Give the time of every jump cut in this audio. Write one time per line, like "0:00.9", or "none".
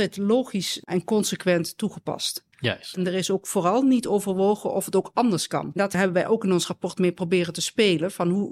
0:02.5